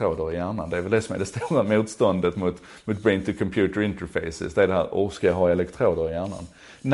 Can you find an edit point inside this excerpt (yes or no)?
no